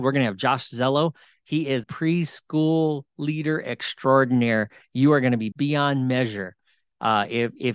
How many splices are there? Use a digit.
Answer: 2